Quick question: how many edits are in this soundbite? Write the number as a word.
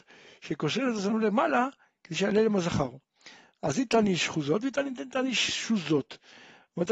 zero